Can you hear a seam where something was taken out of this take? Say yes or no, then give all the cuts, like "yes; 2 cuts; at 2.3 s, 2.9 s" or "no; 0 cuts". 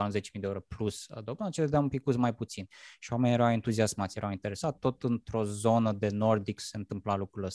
no; 0 cuts